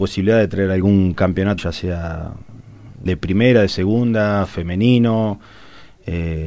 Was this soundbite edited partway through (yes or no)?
yes